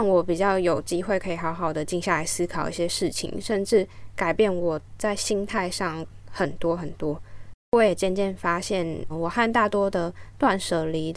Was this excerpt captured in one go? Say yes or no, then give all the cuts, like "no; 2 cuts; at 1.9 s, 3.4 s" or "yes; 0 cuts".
no; 1 cut; at 9.1 s